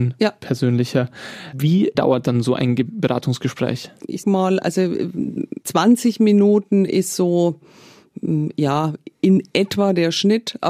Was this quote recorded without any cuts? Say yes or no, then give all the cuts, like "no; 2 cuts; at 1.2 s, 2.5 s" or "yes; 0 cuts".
no; 3 cuts; at 1.9 s, 4.2 s, 5.6 s